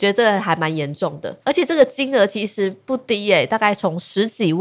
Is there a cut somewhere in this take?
yes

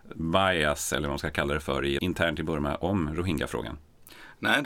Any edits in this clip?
yes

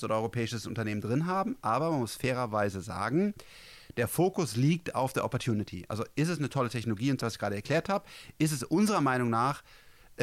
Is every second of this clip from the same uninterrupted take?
no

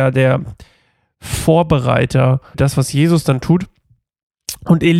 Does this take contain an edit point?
yes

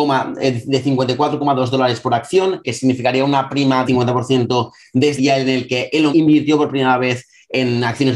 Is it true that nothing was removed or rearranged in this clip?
no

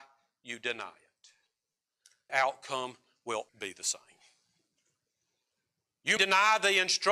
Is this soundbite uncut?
no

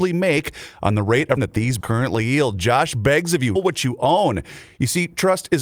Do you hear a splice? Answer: yes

